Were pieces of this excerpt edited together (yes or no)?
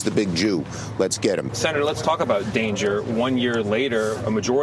no